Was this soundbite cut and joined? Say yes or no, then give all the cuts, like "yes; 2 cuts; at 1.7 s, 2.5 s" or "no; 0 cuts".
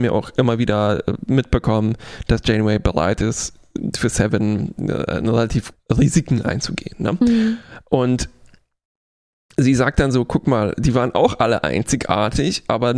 yes; 1 cut; at 5.7 s